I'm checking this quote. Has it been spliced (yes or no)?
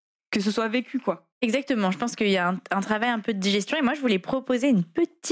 yes